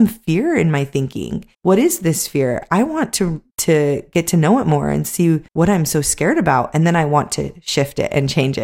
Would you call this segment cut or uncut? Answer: cut